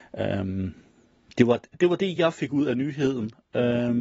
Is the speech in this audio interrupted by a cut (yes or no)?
no